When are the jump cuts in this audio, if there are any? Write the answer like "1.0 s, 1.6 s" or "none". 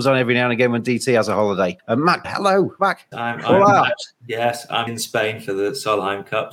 2.2 s, 2.8 s, 3.1 s, 4.9 s